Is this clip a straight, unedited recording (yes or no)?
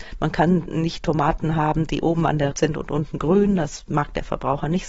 no